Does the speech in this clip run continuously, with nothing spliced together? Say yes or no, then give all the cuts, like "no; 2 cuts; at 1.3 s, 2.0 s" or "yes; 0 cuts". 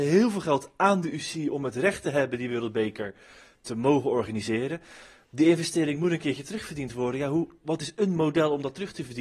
yes; 0 cuts